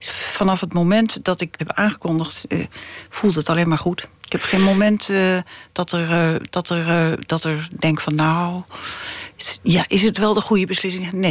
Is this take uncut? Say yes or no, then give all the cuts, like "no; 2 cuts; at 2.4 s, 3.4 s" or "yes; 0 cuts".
no; 3 cuts; at 1.6 s, 4.2 s, 6.5 s